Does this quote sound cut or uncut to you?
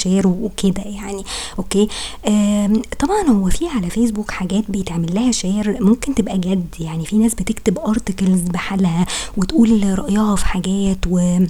uncut